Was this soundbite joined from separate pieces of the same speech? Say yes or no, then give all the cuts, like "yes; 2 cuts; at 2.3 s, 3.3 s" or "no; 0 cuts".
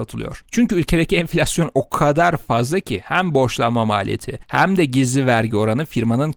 no; 0 cuts